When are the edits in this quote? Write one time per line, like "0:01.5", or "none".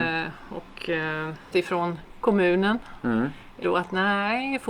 0:01.5
0:03.6